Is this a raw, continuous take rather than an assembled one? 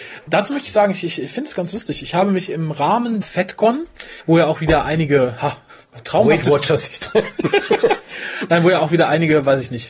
no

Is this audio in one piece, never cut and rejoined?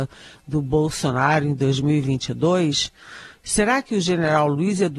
yes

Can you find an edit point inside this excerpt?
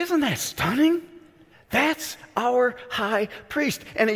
yes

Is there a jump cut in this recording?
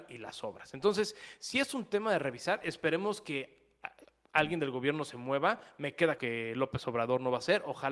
yes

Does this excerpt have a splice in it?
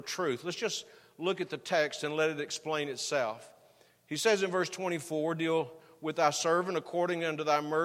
no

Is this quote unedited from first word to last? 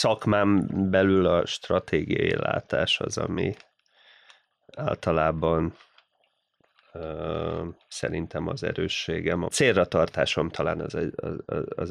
yes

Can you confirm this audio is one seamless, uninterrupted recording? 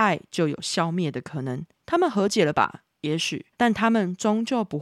no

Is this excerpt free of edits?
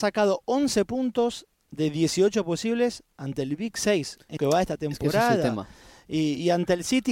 no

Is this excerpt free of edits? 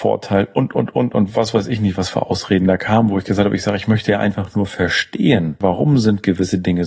yes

